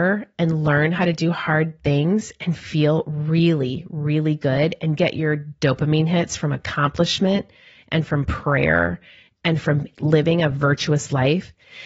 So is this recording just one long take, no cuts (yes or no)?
yes